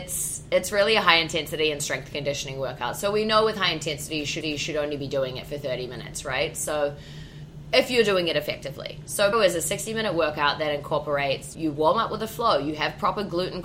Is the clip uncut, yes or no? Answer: no